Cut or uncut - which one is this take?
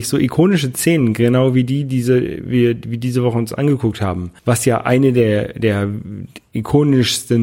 cut